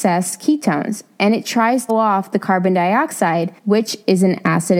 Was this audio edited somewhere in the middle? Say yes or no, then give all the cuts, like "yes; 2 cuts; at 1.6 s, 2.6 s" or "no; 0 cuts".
yes; 2 cuts; at 1.9 s, 3.6 s